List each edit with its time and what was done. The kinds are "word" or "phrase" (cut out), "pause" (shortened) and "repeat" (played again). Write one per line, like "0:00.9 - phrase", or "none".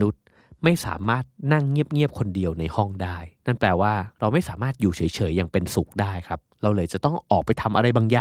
0:03.4 - pause